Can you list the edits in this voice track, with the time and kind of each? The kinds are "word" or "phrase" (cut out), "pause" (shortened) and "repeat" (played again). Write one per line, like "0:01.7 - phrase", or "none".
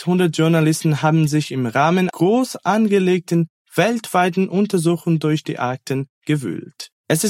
0:02.1 - word